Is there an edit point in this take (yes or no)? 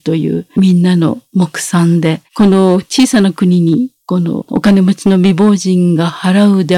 yes